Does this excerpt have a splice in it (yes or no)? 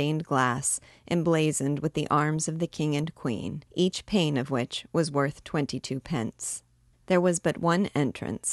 yes